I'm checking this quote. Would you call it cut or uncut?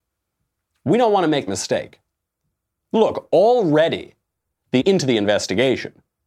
cut